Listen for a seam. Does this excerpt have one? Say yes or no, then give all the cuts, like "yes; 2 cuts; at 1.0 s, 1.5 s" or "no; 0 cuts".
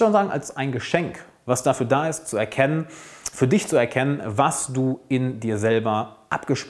no; 0 cuts